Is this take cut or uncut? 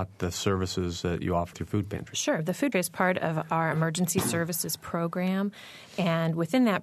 cut